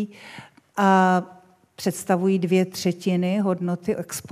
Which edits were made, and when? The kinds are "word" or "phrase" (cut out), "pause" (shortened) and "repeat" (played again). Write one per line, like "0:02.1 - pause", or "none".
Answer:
none